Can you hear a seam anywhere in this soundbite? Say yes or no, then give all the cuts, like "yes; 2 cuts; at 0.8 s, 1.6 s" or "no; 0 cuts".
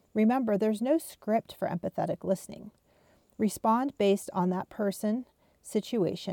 no; 0 cuts